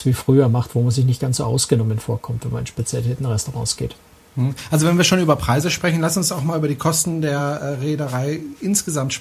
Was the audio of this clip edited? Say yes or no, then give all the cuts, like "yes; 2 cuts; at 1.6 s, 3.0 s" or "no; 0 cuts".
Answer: no; 0 cuts